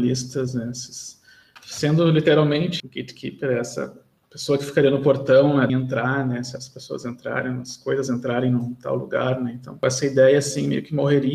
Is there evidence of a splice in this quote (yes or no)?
yes